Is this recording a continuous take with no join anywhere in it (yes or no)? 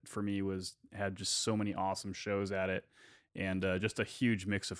yes